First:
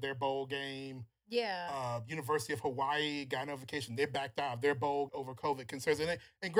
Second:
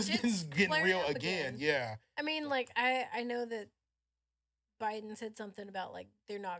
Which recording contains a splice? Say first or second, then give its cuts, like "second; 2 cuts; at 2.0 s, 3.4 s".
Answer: first; 1 cut; at 5.1 s